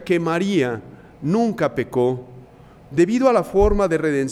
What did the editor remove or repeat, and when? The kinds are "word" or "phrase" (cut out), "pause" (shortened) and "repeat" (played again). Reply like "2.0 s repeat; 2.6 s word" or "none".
none